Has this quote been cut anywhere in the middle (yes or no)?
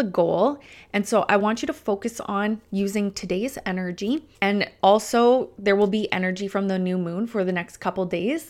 yes